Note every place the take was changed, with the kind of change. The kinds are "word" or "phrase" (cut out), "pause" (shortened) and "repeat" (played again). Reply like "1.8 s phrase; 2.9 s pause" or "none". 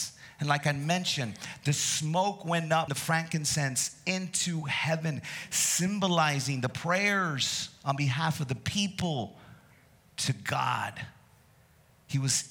2.9 s word